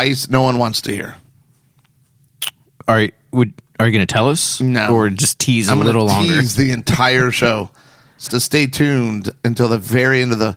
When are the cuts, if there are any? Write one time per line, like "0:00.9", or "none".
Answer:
0:08.3